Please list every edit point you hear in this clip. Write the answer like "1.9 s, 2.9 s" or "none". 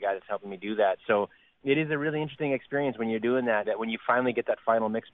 1.6 s, 3.6 s

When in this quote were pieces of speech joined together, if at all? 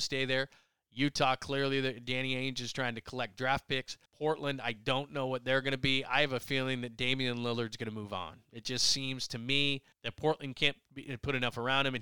4.0 s, 9.9 s

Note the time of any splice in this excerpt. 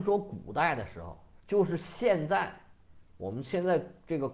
1.4 s

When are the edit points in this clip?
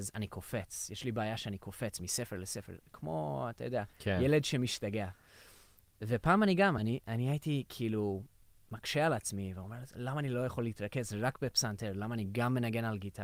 none

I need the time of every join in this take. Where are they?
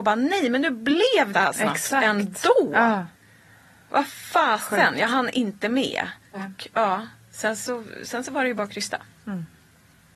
1.3 s, 6.2 s

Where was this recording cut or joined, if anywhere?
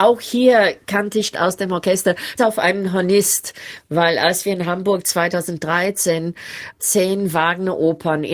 1.3 s, 2.4 s, 6.8 s

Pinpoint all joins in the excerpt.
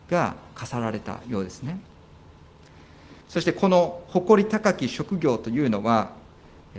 3.2 s

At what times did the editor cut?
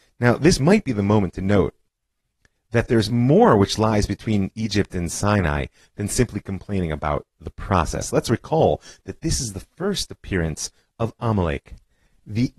none

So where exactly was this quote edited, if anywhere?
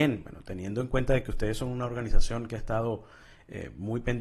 none

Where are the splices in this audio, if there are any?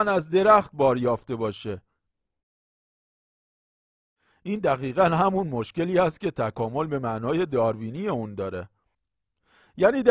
none

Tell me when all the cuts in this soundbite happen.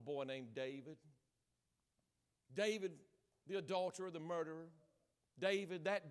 none

